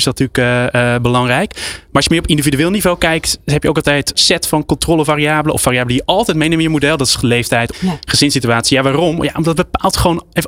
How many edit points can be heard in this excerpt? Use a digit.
3